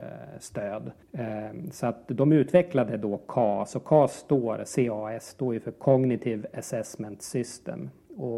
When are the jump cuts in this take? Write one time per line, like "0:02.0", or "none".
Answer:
0:01.0